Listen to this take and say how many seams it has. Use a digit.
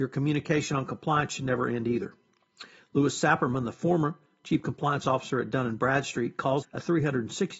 1